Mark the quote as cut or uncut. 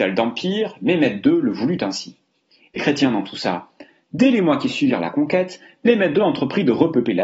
cut